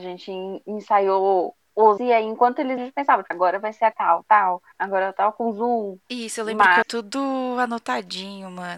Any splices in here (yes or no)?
yes